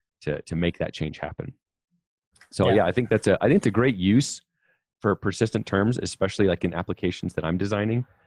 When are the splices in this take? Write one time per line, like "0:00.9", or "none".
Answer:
none